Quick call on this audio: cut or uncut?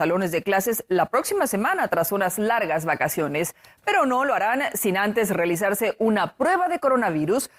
uncut